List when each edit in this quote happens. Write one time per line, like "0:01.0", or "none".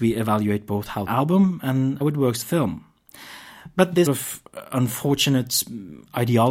0:01.1
0:02.0
0:02.4
0:04.1